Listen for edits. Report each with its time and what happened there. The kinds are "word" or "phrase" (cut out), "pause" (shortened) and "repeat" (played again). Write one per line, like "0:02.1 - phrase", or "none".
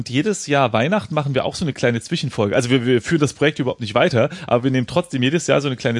none